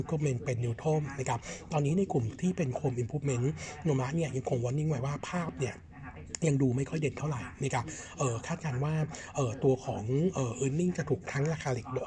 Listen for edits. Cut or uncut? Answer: uncut